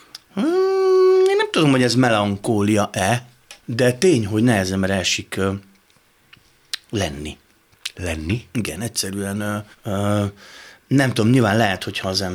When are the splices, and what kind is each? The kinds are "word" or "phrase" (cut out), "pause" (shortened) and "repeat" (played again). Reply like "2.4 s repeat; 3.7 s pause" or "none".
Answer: 3.6 s pause; 9.7 s pause